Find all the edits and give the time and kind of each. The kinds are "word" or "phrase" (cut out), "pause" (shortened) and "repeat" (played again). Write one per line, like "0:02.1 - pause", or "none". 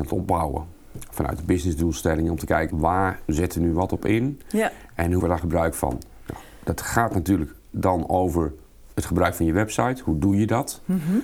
0:02.7 - word
0:05.2 - word
0:08.9 - pause